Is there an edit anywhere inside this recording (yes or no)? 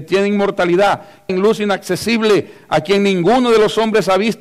yes